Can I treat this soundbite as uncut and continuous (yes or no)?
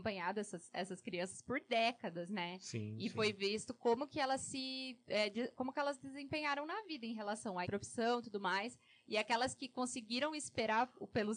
no